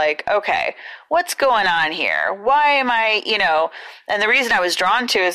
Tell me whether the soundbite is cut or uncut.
uncut